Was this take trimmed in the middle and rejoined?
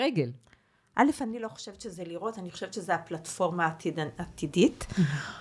no; 0 cuts

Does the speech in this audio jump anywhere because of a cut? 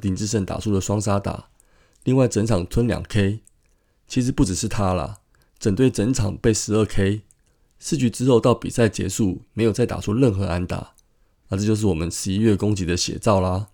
no; 0 cuts

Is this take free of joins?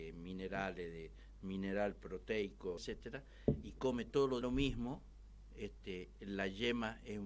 no; 3 cuts; at 1.4 s, 2.8 s, 4.4 s

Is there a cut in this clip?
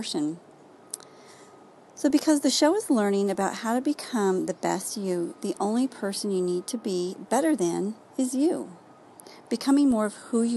no; 0 cuts

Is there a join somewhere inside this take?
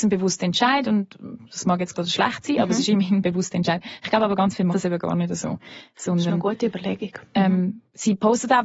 yes; 2 cuts; at 1.9 s, 4.7 s

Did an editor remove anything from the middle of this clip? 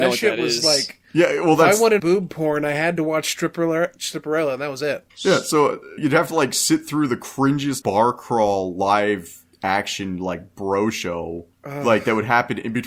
yes; 6 cuts; at 1.1 s, 2.0 s, 5.1 s, 6.0 s, 7.8 s, 11.5 s

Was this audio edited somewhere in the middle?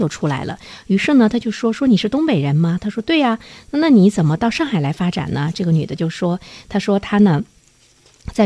no; 0 cuts

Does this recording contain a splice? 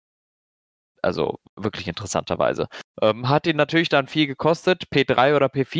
yes; 1 cut; at 2.9 s

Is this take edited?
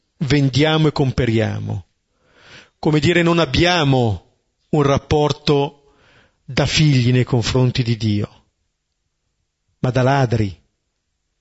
no; 0 cuts

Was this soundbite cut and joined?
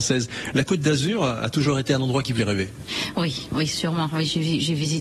yes; 1 cut; at 2.4 s

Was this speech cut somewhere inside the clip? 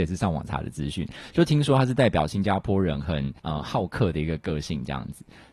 yes; 1 cut; at 3.4 s

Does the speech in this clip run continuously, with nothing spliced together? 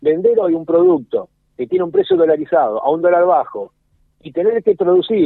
yes; 0 cuts

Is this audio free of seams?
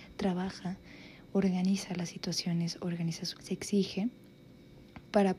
no; 1 cut; at 3.3 s

